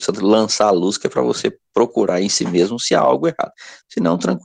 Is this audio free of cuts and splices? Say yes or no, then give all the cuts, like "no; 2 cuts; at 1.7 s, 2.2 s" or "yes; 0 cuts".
yes; 0 cuts